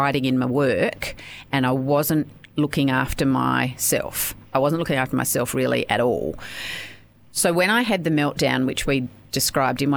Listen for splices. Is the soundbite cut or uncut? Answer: uncut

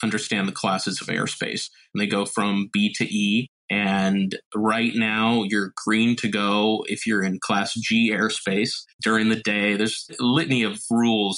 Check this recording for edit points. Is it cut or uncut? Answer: cut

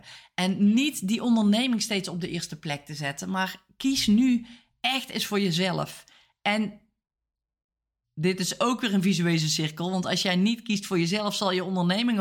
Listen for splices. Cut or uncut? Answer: uncut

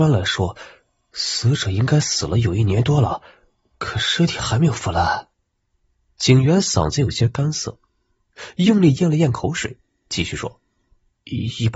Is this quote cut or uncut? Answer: cut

